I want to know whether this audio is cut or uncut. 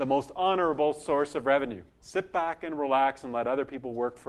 cut